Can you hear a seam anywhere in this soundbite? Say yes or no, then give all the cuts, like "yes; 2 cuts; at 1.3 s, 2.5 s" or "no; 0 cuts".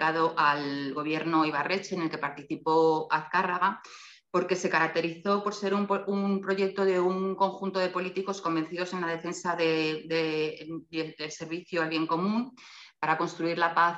no; 0 cuts